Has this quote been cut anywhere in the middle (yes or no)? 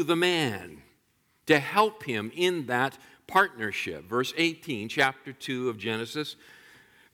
no